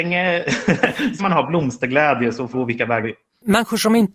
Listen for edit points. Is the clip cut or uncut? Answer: cut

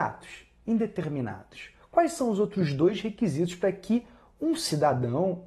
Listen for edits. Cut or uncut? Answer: uncut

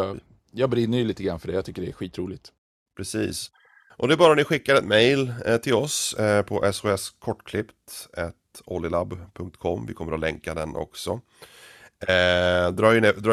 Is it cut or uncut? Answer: uncut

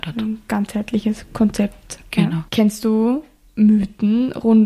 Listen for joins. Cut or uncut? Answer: cut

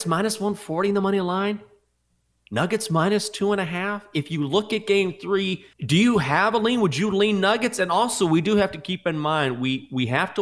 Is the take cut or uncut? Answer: cut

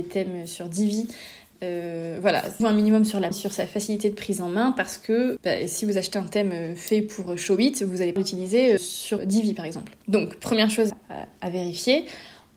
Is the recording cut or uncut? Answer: cut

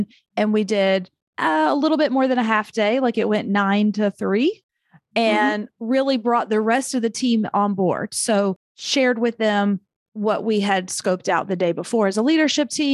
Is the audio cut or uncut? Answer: uncut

